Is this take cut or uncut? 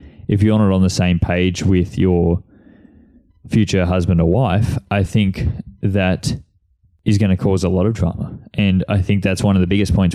uncut